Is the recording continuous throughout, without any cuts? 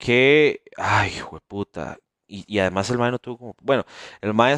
yes; 0 cuts

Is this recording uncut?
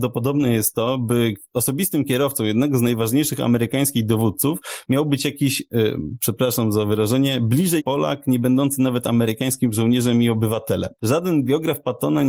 no; 1 cut; at 7.8 s

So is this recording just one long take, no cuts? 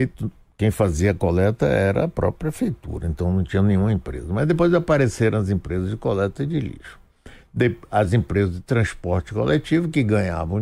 yes; 0 cuts

